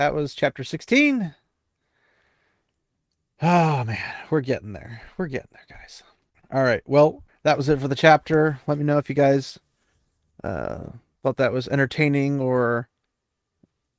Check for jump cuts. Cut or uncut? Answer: cut